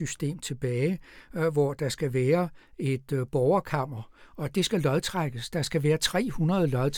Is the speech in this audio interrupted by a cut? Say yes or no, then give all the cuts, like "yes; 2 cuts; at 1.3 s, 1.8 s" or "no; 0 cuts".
no; 0 cuts